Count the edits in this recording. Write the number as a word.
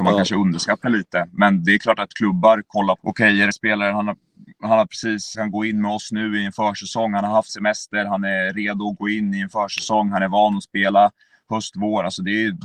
four